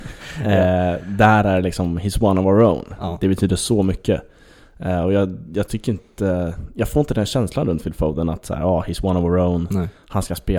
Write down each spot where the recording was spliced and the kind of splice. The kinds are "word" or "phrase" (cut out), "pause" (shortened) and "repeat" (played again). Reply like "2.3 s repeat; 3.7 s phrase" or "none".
none